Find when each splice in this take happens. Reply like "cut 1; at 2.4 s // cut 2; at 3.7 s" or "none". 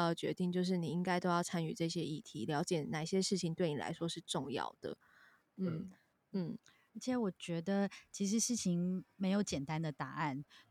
none